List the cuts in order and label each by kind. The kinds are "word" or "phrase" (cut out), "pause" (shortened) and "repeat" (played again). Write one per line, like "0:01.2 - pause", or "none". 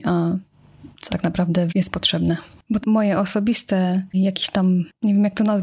0:01.1 - word
0:01.7 - word
0:02.8 - word
0:04.1 - word

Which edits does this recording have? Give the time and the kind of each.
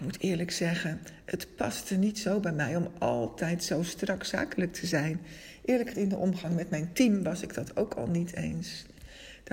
0:05.9 - word

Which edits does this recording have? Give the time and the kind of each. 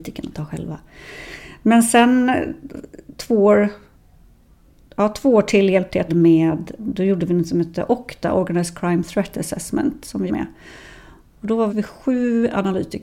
0:06.1 - word
0:06.8 - word
0:10.3 - word
0:11.7 - word

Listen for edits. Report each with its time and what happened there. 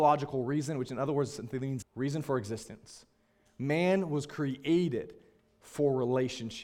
0:01.8 - word

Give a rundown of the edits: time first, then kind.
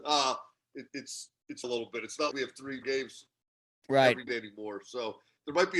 0:01.6 - phrase
0:02.3 - word
0:02.8 - word
0:04.3 - word

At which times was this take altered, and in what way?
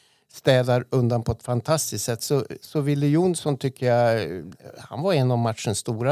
none

